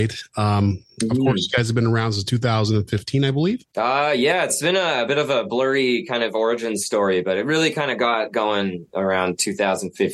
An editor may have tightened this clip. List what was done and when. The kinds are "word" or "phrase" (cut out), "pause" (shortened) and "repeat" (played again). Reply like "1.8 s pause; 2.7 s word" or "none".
3.7 s pause